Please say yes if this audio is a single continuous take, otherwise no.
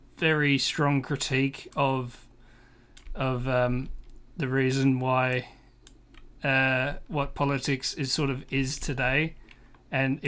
no